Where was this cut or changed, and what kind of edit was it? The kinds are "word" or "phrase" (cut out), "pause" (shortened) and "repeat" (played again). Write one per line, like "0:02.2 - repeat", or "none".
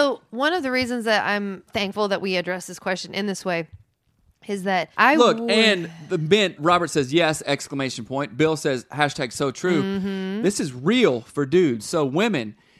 0:01.7 - word
0:04.9 - pause
0:06.6 - word